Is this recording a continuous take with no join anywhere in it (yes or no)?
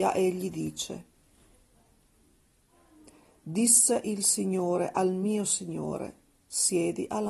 yes